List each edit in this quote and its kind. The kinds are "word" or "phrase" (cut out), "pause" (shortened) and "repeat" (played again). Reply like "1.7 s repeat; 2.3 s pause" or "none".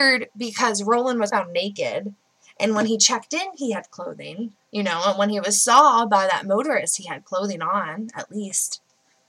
1.3 s word; 4.6 s pause